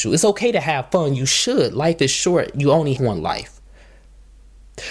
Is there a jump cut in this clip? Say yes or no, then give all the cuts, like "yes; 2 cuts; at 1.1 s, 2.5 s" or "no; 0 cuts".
yes; 1 cut; at 3.0 s